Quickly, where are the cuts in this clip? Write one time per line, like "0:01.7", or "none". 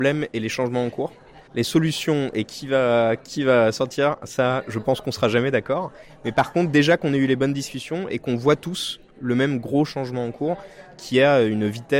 0:01.5